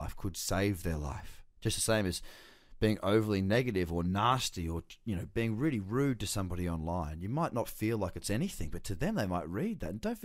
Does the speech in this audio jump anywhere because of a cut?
yes; 1 cut; at 1.5 s

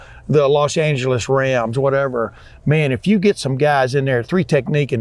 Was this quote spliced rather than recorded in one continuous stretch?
no; 0 cuts

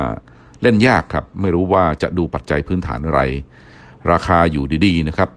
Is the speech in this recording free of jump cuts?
yes; 0 cuts

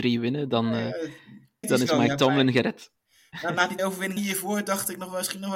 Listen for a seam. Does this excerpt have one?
yes; 3 cuts; at 1.6 s, 3.8 s, 4.2 s

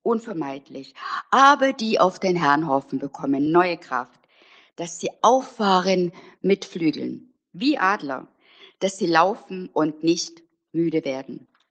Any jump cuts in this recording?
no; 0 cuts

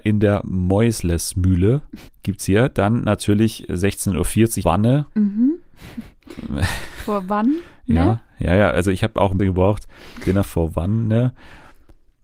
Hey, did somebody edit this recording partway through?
yes; 4 cuts; at 2.1 s, 4.6 s, 5.1 s, 9.4 s

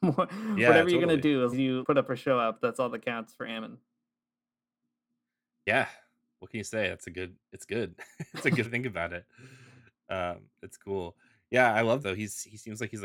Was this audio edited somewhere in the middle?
yes; 4 cuts; at 1.5 s, 1.8 s, 8.6 s, 12.0 s

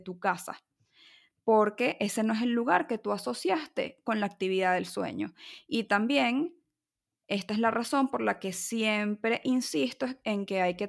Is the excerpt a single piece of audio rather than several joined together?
yes; 0 cuts

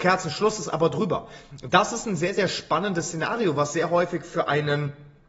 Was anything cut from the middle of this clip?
no; 0 cuts

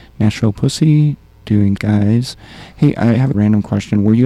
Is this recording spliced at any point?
yes; 2 cuts; at 1.8 s, 3.3 s

